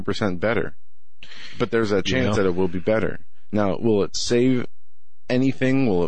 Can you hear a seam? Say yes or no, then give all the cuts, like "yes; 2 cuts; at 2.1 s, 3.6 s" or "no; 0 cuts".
no; 0 cuts